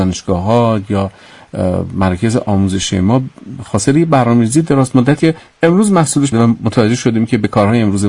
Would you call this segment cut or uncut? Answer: cut